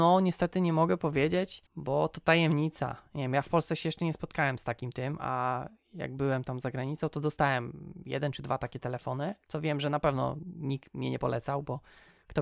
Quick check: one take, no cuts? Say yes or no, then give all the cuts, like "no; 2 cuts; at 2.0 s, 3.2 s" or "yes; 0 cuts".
no; 1 cut; at 1.7 s